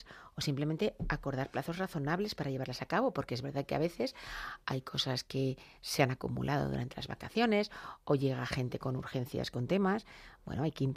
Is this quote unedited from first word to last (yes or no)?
yes